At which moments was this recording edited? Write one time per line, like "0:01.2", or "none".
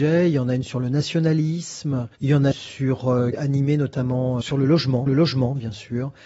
0:02.2
0:02.5
0:03.3
0:04.4
0:05.1